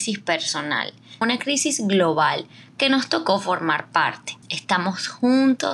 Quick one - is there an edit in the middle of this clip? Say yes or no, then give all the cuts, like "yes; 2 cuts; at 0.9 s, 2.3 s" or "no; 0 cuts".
yes; 2 cuts; at 1.2 s, 4.4 s